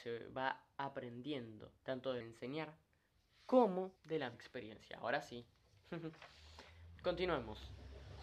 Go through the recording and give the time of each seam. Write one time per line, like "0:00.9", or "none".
0:01.8
0:02.2
0:04.0
0:04.3
0:07.0